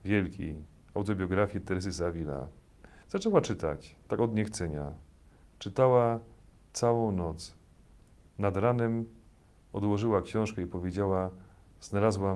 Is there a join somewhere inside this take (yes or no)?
yes